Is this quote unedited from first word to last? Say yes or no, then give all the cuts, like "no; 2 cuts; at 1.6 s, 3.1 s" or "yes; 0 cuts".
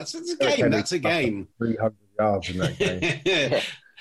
yes; 0 cuts